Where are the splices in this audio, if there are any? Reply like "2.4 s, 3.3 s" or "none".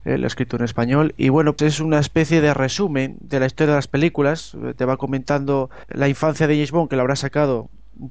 1.2 s, 1.6 s, 5.9 s